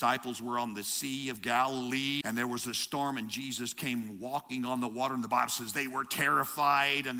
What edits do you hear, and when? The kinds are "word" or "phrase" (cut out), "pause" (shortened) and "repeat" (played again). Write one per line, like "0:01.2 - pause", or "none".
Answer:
0:02.2 - word

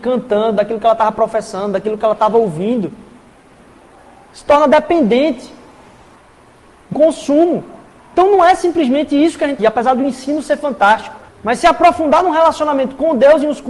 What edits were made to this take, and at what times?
0:06.9 - word
0:09.6 - phrase
0:11.3 - pause

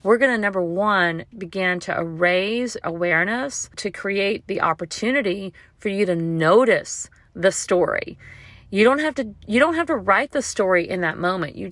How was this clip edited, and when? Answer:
0:01.3 - word
0:02.8 - word

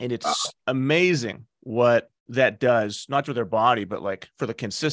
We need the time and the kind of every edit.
0:02.2 - pause
0:03.2 - word

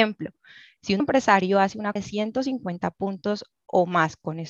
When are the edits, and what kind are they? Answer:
0:01.0 - word
0:02.0 - word

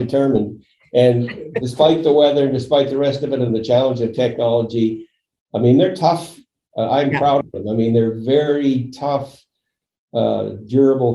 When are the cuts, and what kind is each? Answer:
none

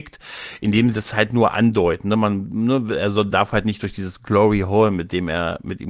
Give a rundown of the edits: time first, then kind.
0:00.9 - word
0:03.3 - word

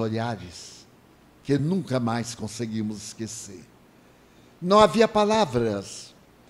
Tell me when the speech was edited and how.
none

